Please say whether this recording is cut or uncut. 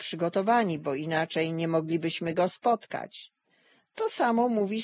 uncut